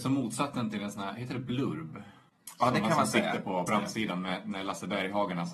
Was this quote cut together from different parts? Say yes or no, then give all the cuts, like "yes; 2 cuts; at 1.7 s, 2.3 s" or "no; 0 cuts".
yes; 1 cut; at 3.7 s